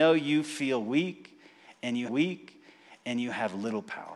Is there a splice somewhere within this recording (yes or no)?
yes